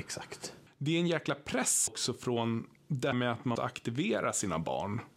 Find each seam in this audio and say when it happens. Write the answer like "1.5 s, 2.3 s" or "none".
1.9 s, 3.1 s, 3.6 s